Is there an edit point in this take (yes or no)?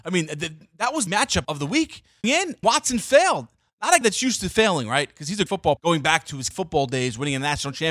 yes